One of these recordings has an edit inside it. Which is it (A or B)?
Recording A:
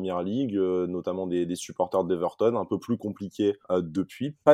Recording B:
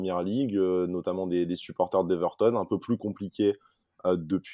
A